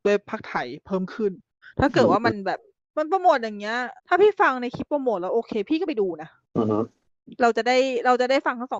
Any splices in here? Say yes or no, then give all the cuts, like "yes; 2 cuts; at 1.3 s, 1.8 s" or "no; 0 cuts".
yes; 1 cut; at 4.0 s